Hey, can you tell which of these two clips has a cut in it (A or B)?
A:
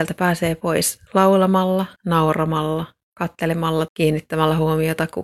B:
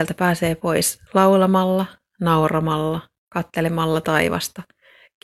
A